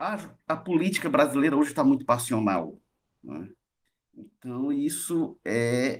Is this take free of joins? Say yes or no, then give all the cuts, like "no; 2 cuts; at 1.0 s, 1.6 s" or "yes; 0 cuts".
yes; 0 cuts